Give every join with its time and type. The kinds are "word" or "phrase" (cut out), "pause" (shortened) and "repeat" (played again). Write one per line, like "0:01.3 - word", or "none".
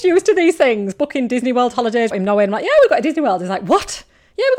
0:02.1 - word